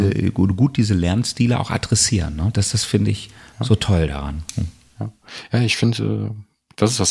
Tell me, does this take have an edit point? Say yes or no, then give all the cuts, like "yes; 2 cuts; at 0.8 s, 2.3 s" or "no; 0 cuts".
no; 0 cuts